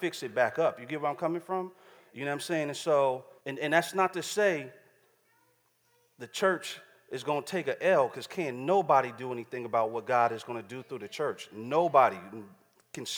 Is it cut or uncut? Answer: cut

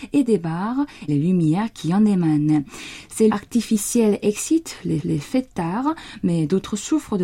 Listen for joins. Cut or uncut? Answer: cut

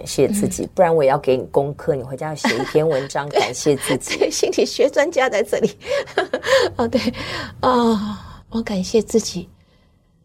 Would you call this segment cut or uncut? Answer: cut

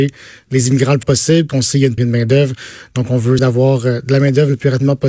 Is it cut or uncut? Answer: cut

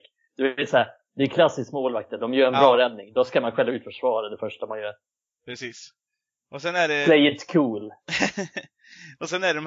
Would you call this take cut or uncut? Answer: uncut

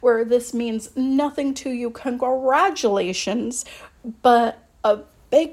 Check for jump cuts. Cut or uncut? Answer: uncut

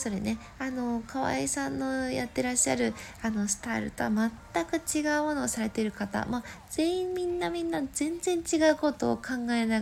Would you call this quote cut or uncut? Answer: uncut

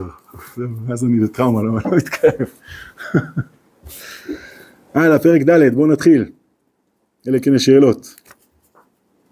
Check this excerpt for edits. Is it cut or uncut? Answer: uncut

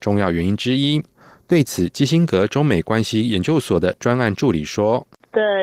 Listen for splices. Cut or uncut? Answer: uncut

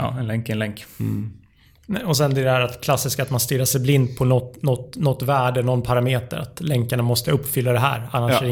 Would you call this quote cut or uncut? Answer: uncut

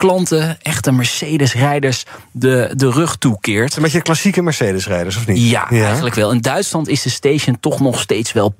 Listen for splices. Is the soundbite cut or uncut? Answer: uncut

